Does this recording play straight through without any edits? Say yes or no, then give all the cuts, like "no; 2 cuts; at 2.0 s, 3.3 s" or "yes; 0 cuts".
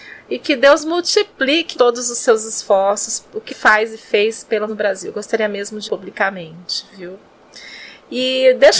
no; 4 cuts; at 1.7 s, 3.5 s, 4.7 s, 5.9 s